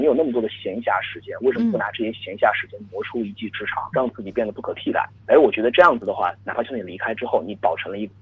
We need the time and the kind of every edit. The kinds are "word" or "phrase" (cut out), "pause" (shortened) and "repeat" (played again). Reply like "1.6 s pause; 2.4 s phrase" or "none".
3.9 s word; 5.2 s word